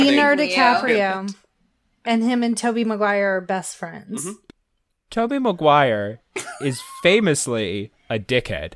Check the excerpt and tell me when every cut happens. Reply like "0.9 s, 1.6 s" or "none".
none